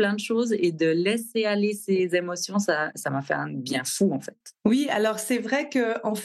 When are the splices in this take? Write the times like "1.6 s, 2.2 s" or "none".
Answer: 4.6 s